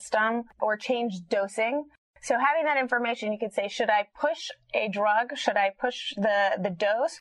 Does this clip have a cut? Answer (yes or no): no